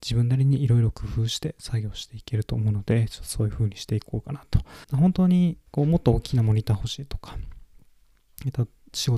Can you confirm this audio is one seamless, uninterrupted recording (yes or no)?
no